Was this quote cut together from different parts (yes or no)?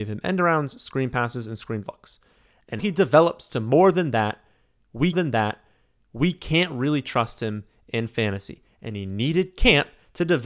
yes